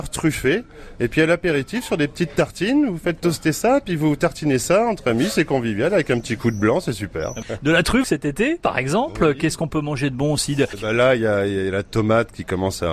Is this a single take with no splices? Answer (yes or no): no